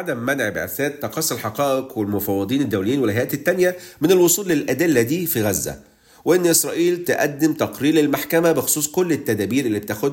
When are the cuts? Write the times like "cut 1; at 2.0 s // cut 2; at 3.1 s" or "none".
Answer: none

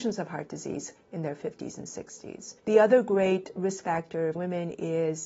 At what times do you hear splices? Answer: cut 1; at 2.6 s // cut 2; at 4.4 s

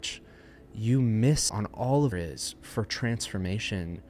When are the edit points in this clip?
cut 1; at 1.5 s // cut 2; at 2.1 s

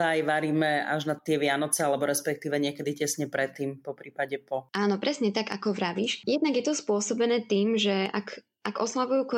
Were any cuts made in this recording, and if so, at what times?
none

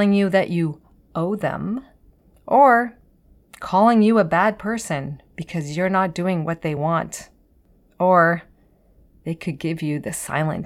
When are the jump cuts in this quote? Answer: none

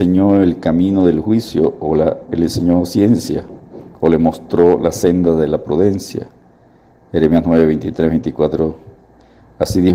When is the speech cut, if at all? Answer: none

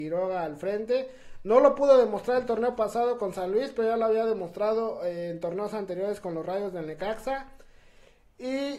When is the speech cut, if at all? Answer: none

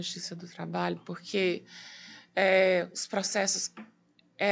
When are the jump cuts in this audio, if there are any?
none

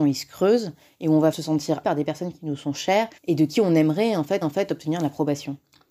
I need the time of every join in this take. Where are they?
cut 1; at 1.3 s // cut 2; at 1.8 s // cut 3; at 3.2 s // cut 4; at 4.4 s

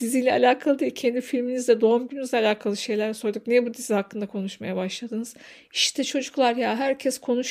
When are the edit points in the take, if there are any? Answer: none

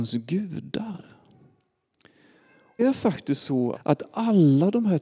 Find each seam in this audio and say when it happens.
cut 1; at 2.8 s // cut 2; at 3.7 s

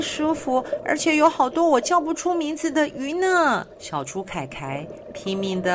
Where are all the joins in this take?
cut 1; at 3.7 s

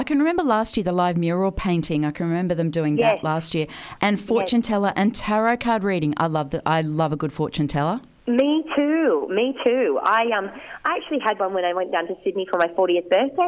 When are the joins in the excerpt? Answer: cut 1; at 8.2 s

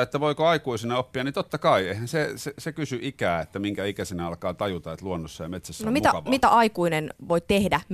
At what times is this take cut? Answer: none

